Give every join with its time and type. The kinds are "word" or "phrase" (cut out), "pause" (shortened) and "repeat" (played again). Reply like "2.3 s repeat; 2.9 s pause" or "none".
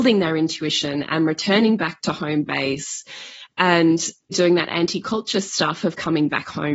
4.3 s word